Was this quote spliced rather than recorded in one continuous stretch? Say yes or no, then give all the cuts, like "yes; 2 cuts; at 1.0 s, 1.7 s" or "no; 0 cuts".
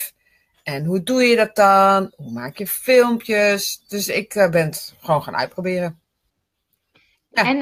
no; 0 cuts